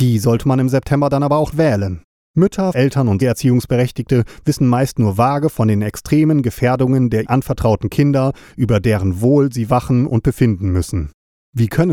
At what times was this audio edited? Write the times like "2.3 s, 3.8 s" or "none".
1.5 s, 2.7 s, 3.2 s, 7.2 s